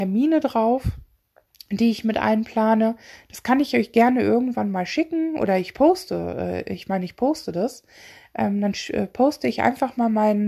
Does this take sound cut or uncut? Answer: uncut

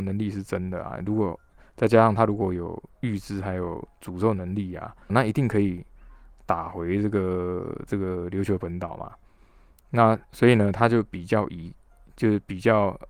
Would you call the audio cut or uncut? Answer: cut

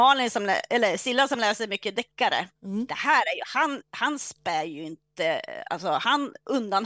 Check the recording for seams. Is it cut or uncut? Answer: cut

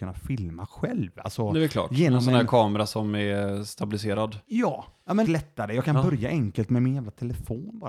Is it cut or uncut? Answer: cut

